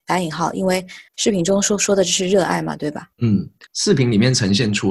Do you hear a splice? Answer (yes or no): yes